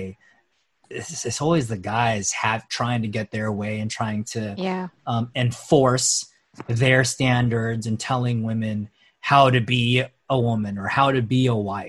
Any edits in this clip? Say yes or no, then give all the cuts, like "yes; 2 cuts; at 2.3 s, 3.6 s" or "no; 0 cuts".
no; 0 cuts